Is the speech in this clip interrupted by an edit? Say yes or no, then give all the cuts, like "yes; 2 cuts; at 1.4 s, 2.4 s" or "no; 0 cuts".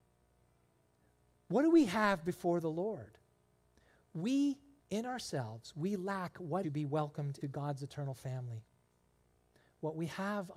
yes; 3 cuts; at 4.8 s, 6.6 s, 7.4 s